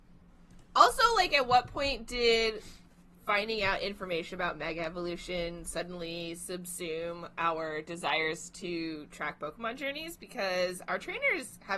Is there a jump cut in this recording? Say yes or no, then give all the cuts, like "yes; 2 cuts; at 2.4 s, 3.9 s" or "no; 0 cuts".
no; 0 cuts